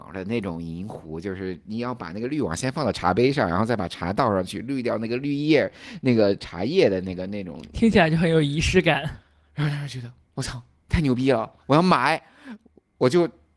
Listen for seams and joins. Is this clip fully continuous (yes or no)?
yes